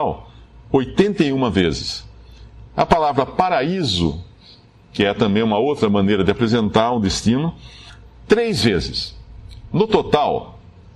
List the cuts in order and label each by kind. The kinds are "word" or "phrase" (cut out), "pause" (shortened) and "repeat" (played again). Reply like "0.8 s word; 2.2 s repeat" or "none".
none